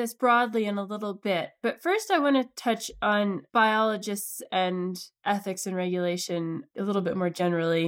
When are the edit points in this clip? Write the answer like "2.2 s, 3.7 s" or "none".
none